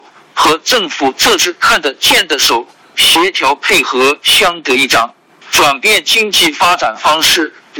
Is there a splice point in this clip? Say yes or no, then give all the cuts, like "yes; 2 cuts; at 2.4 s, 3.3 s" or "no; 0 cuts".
no; 0 cuts